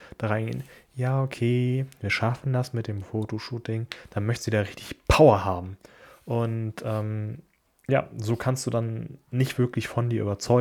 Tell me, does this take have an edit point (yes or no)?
no